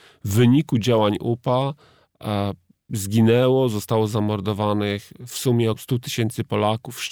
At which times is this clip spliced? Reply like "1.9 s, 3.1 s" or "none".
5.7 s